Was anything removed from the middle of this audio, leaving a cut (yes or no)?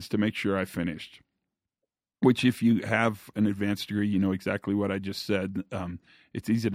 no